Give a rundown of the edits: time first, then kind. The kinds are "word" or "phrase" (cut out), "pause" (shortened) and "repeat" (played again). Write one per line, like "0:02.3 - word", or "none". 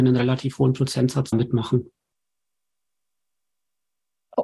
0:01.3 - phrase